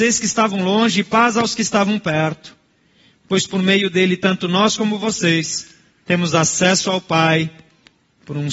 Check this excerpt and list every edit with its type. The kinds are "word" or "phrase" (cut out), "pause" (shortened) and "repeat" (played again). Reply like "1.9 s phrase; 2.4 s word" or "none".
none